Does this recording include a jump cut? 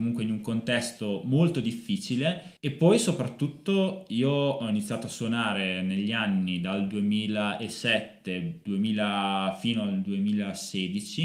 yes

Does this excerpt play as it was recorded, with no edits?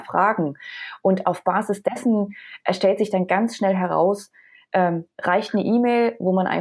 yes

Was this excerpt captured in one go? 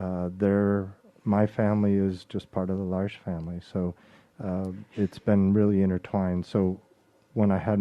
yes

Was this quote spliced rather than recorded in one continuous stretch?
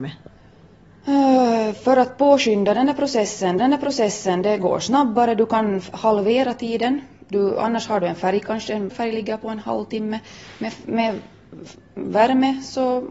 yes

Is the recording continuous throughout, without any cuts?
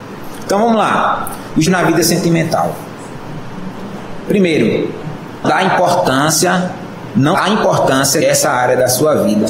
no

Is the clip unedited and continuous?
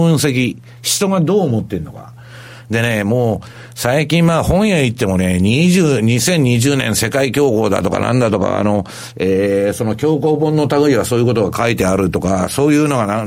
yes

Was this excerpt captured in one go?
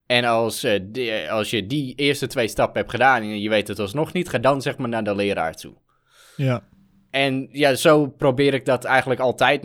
yes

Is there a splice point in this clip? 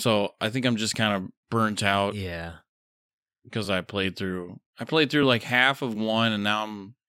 no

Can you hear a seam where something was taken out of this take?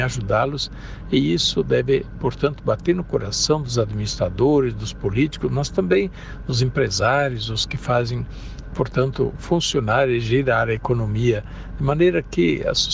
no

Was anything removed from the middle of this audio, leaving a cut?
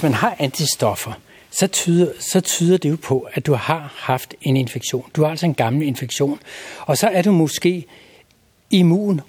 no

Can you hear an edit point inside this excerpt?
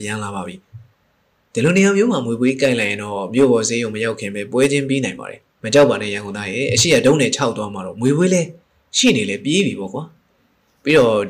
yes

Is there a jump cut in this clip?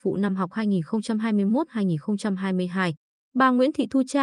no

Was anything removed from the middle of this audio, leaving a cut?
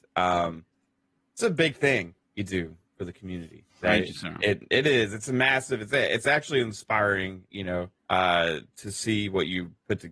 yes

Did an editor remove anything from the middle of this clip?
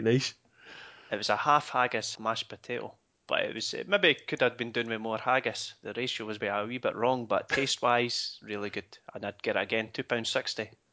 yes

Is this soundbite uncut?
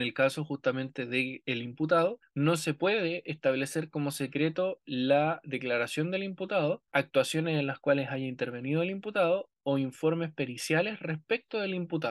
no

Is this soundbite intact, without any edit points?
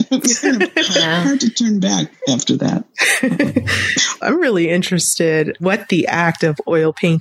no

